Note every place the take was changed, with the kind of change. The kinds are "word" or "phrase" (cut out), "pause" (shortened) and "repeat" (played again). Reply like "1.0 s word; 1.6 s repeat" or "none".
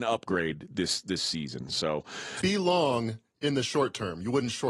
2.4 s word